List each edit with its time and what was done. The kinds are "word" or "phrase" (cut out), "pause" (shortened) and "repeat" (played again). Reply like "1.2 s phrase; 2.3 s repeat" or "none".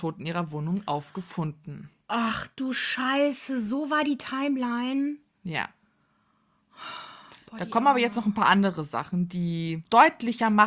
none